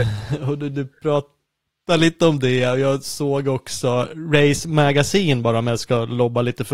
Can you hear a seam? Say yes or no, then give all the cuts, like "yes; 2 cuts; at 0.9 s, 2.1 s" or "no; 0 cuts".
no; 0 cuts